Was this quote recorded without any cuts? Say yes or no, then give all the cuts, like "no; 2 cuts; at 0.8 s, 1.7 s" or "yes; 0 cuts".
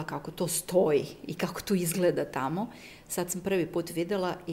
yes; 0 cuts